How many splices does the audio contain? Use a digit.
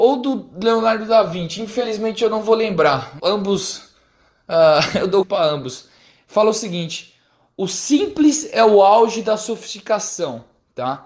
2